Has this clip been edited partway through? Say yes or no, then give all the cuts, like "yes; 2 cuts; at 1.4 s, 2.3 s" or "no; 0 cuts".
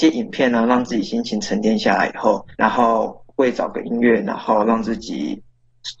yes; 1 cut; at 2.5 s